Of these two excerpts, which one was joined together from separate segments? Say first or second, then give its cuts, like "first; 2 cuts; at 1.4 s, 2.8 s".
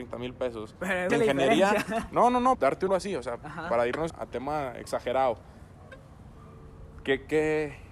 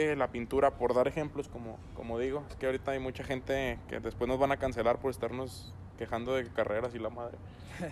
first; 4 cuts; at 1.1 s, 2.5 s, 2.9 s, 4.1 s